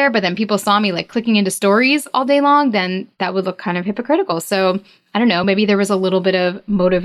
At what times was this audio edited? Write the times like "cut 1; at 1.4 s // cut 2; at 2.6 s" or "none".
none

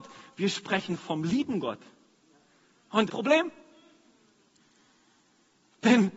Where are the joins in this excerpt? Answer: cut 1; at 3.1 s

